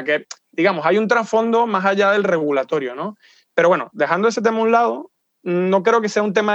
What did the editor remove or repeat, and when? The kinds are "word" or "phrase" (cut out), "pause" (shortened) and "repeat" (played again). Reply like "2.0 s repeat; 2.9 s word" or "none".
none